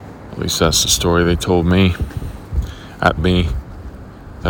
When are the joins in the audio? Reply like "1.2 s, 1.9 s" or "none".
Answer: 3.2 s